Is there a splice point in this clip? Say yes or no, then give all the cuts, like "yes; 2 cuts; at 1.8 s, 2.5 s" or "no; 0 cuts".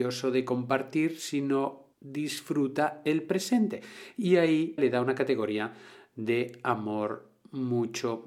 yes; 2 cuts; at 1.9 s, 4.8 s